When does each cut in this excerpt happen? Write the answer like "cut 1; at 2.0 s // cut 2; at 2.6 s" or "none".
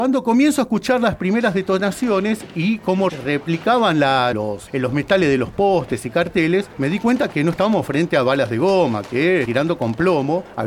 cut 1; at 4.3 s // cut 2; at 9.5 s